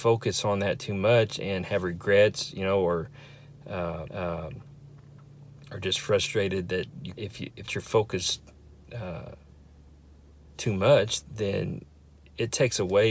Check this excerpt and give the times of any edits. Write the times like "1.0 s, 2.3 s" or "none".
4.1 s, 7.2 s, 7.7 s